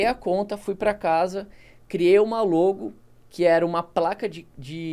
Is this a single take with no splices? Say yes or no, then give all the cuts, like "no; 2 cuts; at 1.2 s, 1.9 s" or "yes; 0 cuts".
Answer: yes; 0 cuts